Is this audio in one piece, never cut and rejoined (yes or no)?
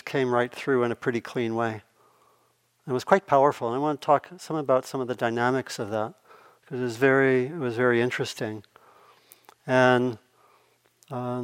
yes